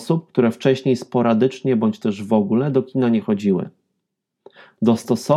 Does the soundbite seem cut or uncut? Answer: uncut